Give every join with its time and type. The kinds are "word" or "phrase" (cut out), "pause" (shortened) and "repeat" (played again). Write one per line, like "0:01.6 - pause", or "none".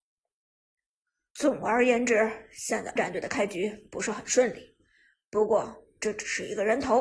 0:03.0 - word